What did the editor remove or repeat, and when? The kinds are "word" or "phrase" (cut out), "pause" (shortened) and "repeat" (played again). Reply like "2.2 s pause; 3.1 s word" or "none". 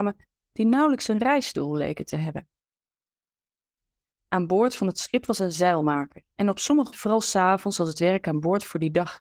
6.9 s word